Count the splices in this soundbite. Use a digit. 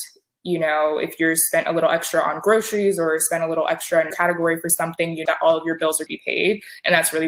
3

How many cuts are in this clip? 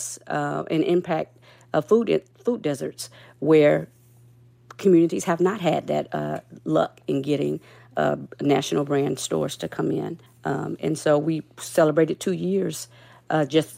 1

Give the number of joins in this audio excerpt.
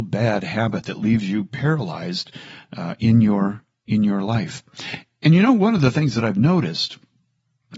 0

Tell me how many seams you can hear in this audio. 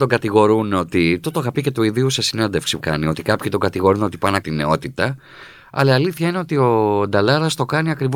2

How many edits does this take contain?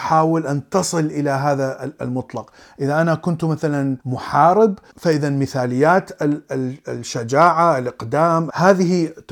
1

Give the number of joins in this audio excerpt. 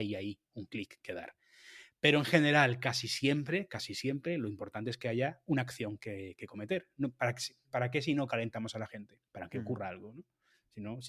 1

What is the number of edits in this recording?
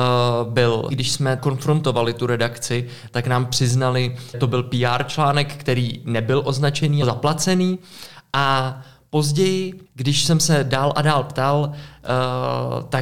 5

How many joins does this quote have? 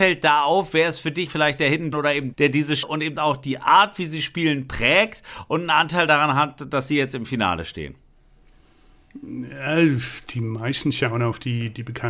4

